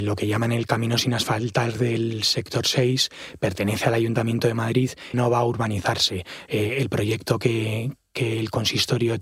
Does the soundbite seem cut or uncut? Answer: cut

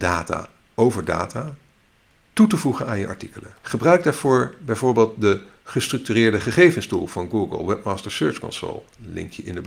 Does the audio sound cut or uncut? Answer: cut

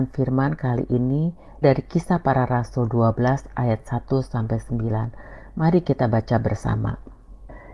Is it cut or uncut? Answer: cut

